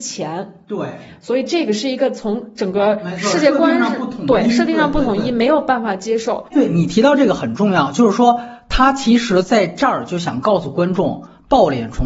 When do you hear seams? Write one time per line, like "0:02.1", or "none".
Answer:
0:06.5

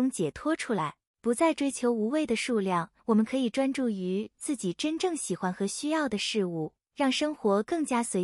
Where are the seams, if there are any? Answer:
0:01.1
0:03.0

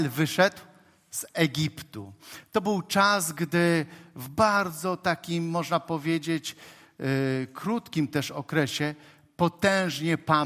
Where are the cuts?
none

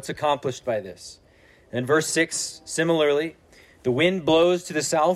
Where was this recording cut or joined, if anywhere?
none

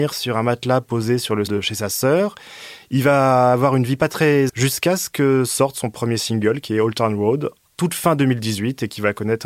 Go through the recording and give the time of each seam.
0:01.5
0:04.5

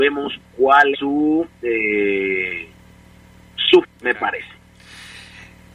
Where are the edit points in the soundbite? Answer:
0:00.9
0:03.8

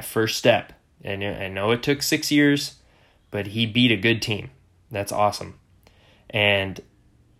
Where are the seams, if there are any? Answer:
none

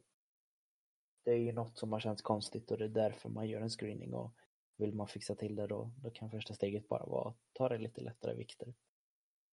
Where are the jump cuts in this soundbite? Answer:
none

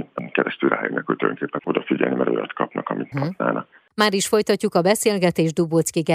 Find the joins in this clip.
0:01.6
0:03.1

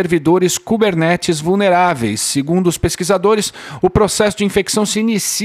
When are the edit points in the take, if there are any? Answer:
none

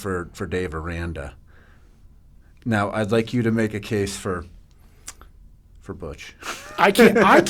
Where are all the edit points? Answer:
none

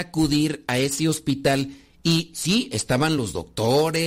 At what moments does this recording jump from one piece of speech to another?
none

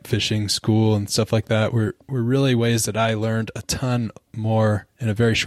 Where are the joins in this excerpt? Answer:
none

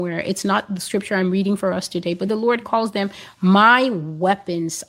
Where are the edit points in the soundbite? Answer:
none

